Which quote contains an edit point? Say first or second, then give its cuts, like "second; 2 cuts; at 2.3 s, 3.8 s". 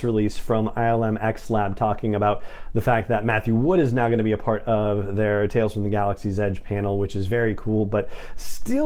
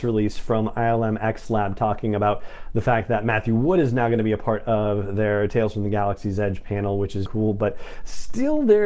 second; 1 cut; at 7.3 s